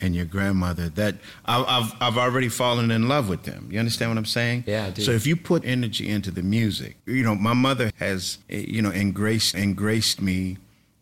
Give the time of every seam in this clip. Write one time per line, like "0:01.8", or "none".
0:05.6
0:07.0
0:07.9
0:08.4
0:09.5